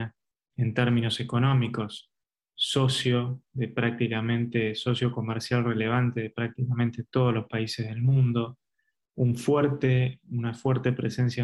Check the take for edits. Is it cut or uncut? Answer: uncut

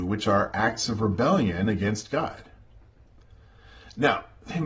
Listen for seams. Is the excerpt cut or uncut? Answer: uncut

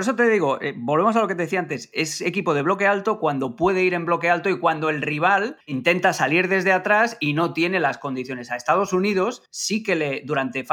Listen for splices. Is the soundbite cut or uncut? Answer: cut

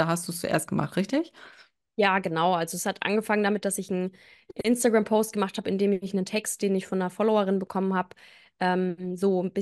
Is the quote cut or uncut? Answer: uncut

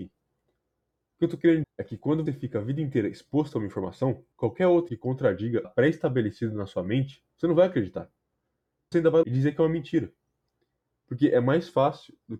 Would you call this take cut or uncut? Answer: cut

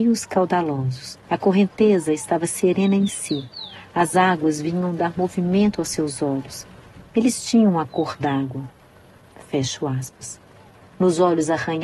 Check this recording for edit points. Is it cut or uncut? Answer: cut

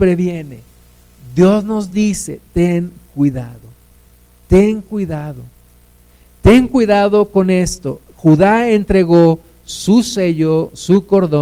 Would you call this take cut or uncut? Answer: uncut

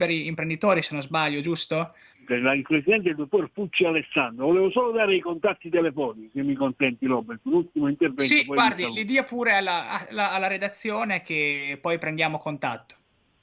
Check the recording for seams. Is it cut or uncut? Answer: cut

